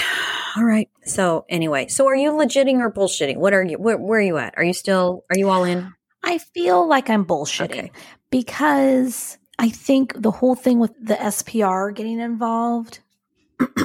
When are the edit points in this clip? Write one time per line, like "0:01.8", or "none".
0:01.0
0:09.5
0:10.9